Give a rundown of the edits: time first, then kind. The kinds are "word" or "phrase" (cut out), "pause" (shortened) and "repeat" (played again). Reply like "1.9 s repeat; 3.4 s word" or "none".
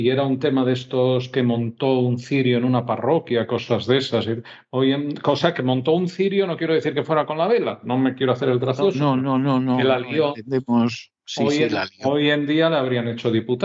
none